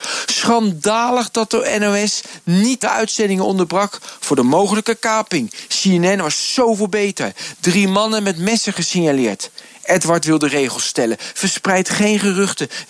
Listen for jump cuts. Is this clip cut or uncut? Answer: cut